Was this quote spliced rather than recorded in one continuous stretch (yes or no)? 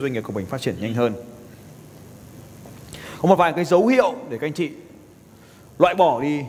no